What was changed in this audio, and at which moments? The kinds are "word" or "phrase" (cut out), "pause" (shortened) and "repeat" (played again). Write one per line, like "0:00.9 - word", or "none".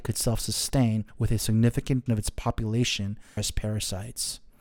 0:01.1 - pause
0:02.1 - word
0:03.4 - phrase

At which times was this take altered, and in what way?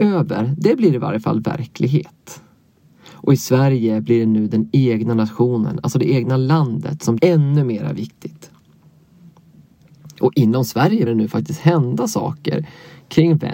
0:07.2 - word
0:11.1 - word

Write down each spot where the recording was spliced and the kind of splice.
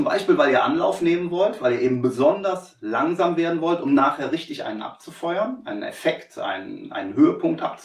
none

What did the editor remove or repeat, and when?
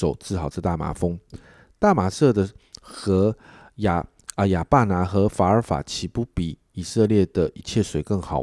none

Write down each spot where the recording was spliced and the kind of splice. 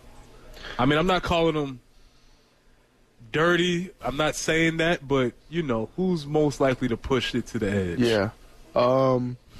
none

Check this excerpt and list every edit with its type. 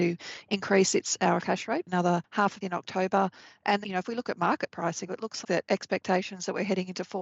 0:01.4 - word
0:01.9 - word
0:02.6 - word
0:03.8 - word
0:05.1 - word
0:05.4 - word

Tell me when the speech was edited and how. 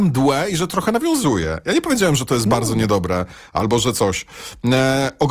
none

